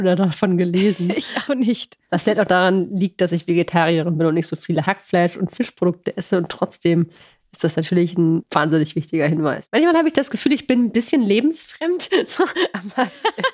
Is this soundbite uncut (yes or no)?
yes